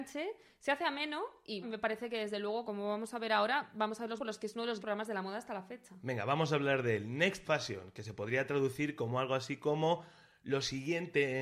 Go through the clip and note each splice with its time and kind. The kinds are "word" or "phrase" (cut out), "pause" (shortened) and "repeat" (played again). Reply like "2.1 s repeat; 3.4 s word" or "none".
1.6 s word; 2.6 s word; 4.2 s word; 4.8 s word; 7.4 s word